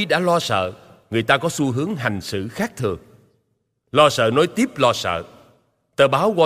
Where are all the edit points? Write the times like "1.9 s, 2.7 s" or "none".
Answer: none